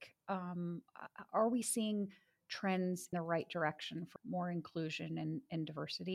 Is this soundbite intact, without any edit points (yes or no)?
no